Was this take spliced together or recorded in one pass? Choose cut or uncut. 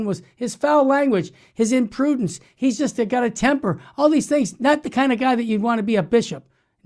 uncut